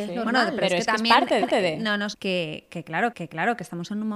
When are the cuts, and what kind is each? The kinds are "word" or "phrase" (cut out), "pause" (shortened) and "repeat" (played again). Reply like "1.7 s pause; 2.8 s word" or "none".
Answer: 1.4 s repeat; 2.1 s word; 3.1 s repeat